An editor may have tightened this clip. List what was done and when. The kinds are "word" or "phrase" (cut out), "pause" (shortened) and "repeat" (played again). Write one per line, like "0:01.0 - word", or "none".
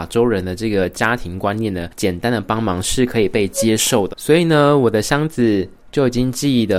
0:04.1 - word